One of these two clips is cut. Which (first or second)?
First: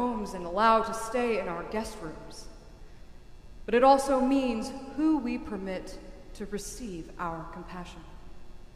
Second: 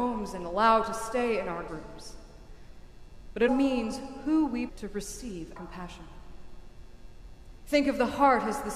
second